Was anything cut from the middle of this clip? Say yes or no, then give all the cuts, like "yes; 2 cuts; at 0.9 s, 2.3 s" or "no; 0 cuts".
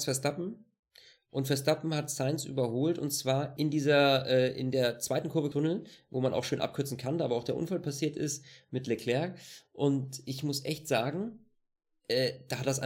yes; 2 cuts; at 3.6 s, 5.5 s